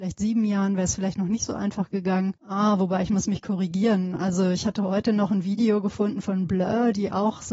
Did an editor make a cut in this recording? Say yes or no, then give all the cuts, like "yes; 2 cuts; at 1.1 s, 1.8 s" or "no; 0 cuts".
yes; 1 cut; at 2.4 s